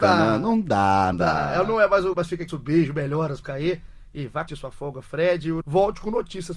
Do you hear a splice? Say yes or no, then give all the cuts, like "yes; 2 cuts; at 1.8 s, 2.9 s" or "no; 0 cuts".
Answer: yes; 6 cuts; at 1.1 s, 2.1 s, 2.5 s, 3.4 s, 4.5 s, 5.6 s